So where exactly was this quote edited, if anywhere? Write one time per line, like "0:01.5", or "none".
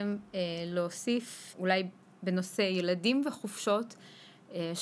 0:01.5